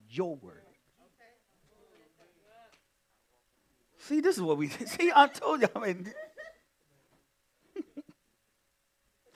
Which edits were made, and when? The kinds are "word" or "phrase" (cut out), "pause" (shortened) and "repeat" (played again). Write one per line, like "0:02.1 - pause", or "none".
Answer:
0:07.1 - pause